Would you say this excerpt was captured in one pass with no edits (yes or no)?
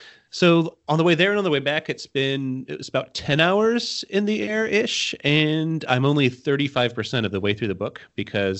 yes